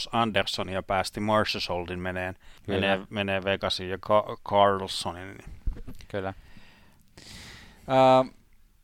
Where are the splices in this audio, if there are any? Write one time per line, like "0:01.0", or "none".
0:02.6